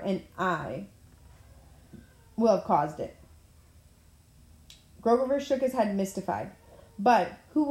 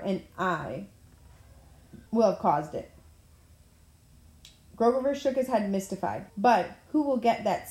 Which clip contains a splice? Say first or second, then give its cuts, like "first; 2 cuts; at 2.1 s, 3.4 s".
second; 2 cuts; at 2.1 s, 6.3 s